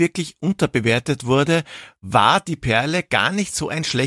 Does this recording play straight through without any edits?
yes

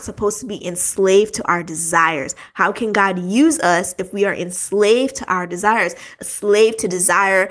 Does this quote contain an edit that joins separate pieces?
no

